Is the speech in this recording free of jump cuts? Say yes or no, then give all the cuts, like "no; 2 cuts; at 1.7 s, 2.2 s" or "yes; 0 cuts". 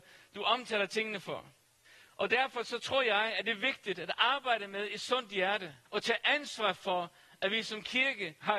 no; 2 cuts; at 1.8 s, 5.9 s